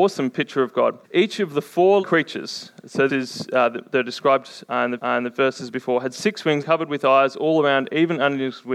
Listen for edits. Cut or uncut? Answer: cut